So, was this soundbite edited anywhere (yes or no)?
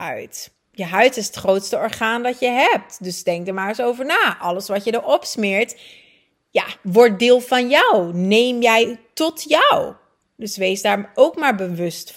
no